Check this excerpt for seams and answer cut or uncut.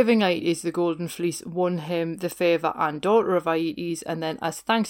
uncut